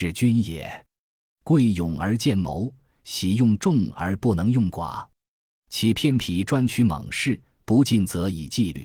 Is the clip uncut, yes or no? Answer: yes